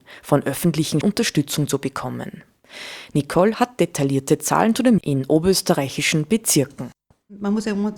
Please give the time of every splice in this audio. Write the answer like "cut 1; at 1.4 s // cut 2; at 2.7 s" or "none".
cut 1; at 1.0 s // cut 2; at 3.5 s // cut 3; at 5.0 s

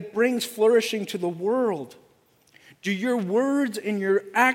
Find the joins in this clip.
none

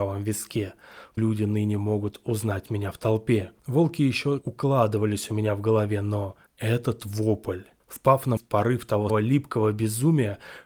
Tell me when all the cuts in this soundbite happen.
cut 1; at 1.2 s // cut 2; at 3.6 s // cut 3; at 4.4 s // cut 4; at 6.5 s // cut 5; at 7.8 s // cut 6; at 8.4 s // cut 7; at 9.1 s

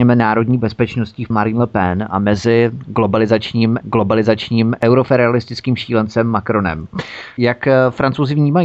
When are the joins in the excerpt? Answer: cut 1; at 1.3 s // cut 2; at 3.8 s

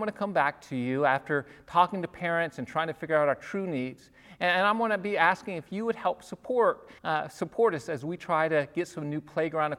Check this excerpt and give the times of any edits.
cut 1; at 7.0 s

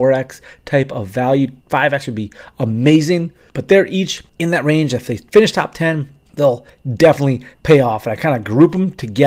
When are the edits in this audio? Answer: cut 1; at 1.6 s // cut 2; at 7.5 s

